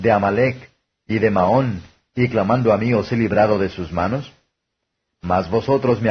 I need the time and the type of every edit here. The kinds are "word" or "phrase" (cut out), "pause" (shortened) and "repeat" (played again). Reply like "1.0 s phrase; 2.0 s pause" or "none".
none